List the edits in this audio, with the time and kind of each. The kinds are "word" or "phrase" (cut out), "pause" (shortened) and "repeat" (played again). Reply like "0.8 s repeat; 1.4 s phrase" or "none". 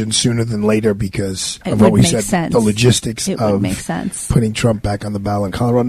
1.6 s pause

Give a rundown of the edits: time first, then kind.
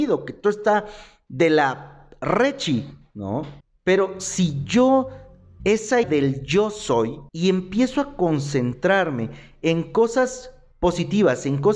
3.6 s pause; 5.6 s phrase; 6.0 s word; 7.3 s pause

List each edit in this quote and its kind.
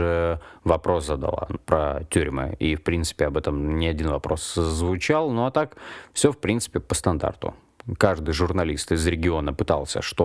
1.6 s word

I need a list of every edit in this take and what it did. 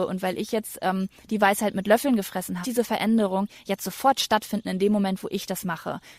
2.6 s phrase

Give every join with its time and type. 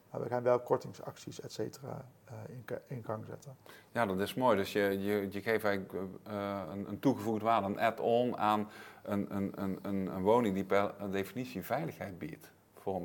none

